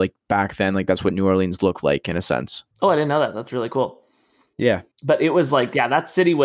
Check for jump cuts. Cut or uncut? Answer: cut